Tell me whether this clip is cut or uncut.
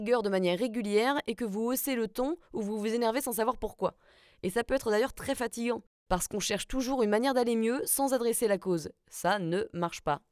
uncut